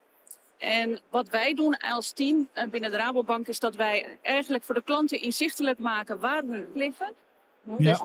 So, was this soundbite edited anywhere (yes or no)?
yes